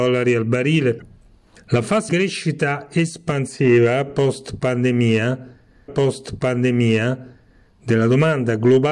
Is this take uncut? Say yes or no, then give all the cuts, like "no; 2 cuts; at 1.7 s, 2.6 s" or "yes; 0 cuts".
no; 2 cuts; at 2.1 s, 5.9 s